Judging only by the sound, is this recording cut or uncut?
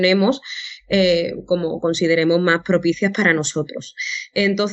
uncut